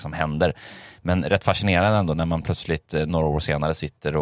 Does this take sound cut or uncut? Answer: uncut